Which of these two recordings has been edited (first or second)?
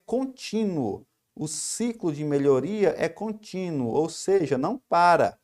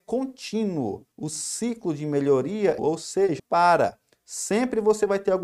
second